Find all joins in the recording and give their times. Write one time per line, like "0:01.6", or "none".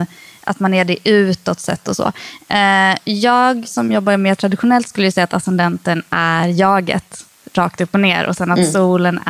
none